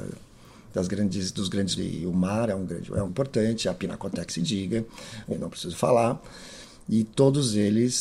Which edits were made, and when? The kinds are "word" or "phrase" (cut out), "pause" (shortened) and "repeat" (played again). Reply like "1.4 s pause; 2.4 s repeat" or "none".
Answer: 1.8 s word; 3.1 s word; 4.3 s word; 5.3 s word